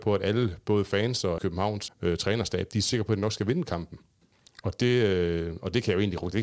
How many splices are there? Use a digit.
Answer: 2